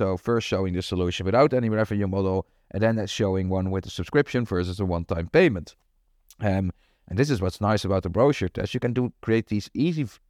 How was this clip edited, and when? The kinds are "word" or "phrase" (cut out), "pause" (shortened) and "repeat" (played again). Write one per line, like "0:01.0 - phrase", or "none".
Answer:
none